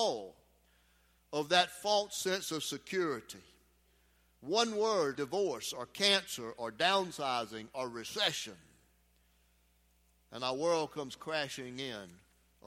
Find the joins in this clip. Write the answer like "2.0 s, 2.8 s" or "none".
5.1 s